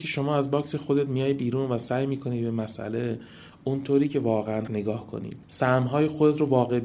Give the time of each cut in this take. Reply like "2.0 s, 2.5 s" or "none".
4.7 s, 5.4 s